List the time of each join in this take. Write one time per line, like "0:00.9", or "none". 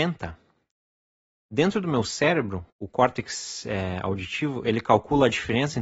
0:02.7